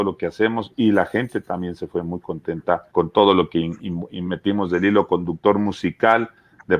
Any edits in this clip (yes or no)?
yes